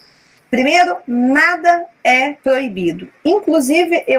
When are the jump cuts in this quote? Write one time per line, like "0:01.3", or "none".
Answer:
0:02.4